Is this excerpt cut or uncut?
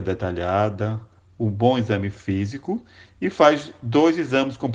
uncut